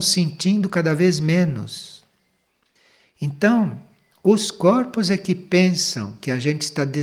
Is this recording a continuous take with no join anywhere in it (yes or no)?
yes